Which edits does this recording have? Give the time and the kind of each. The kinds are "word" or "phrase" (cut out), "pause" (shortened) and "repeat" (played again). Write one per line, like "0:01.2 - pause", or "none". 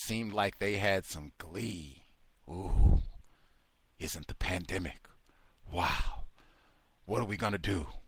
none